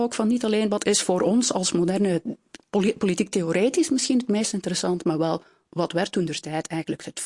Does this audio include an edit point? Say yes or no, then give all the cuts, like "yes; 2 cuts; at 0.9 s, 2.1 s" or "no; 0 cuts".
no; 0 cuts